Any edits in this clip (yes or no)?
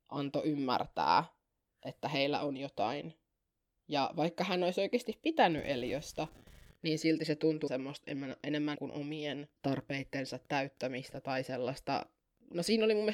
yes